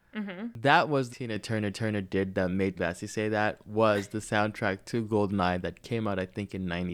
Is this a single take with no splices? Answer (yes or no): no